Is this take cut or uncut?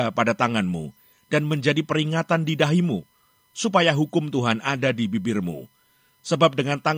uncut